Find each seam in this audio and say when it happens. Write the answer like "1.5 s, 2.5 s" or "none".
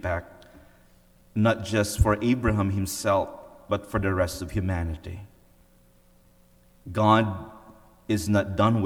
none